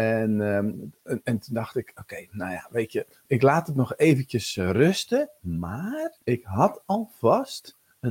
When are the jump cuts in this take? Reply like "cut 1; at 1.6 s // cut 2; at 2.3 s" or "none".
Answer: cut 1; at 6.2 s